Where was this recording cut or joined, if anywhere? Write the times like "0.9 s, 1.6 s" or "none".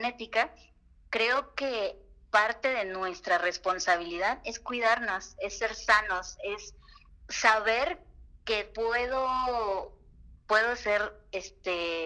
none